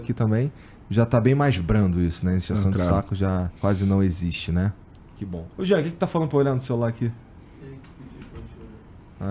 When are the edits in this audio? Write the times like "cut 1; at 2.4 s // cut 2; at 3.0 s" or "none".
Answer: cut 1; at 3.6 s // cut 2; at 5.5 s // cut 3; at 7.6 s